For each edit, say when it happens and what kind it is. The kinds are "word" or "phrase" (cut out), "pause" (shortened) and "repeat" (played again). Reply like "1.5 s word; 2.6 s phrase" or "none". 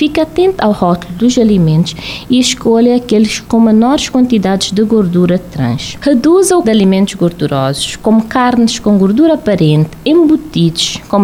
6.6 s word